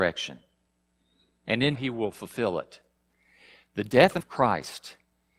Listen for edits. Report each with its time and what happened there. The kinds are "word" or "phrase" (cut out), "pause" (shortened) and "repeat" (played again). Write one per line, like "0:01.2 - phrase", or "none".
0:01.7 - phrase
0:04.2 - word